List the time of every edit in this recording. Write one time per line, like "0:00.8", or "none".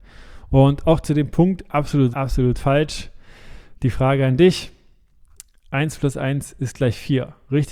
0:02.1